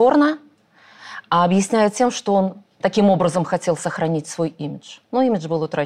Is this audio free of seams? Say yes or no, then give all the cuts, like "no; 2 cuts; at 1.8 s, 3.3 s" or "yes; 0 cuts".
no; 1 cut; at 2.7 s